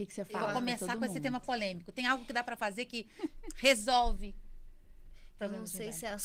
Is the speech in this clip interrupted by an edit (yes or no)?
no